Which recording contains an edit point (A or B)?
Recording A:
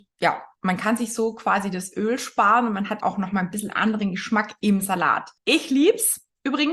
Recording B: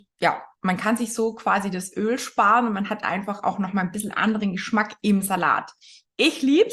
A